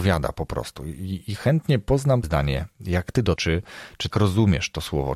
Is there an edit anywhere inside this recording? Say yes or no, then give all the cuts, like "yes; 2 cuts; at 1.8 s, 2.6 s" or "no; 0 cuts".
yes; 3 cuts; at 2.2 s, 3.4 s, 4.1 s